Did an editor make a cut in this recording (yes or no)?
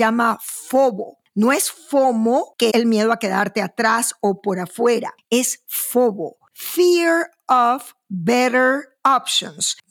yes